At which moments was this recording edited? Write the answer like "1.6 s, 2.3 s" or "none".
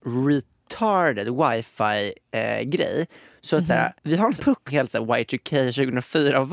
4.0 s, 4.4 s, 4.7 s

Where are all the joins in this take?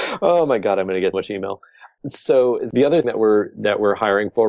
1.1 s, 3.0 s

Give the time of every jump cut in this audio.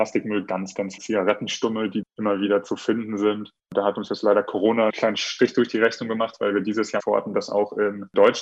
1.0 s, 2.0 s, 4.9 s, 7.0 s

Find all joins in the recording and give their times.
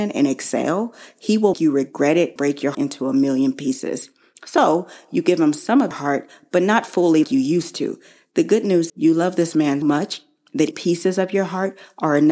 1.5 s, 2.4 s, 2.7 s, 5.9 s, 7.2 s, 8.9 s, 9.8 s, 10.7 s

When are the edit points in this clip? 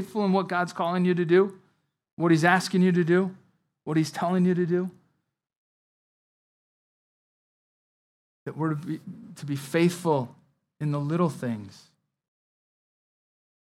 none

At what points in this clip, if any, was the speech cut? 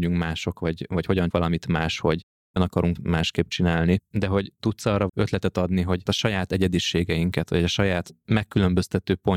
1.3 s, 2.6 s, 3.0 s, 5.1 s, 6.1 s

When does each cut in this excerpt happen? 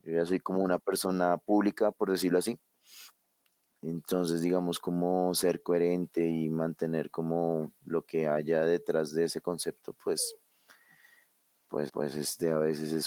11.9 s

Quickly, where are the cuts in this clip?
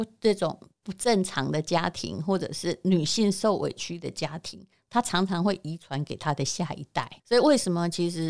7.2 s

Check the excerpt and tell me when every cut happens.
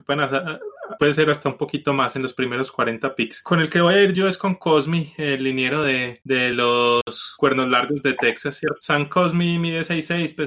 none

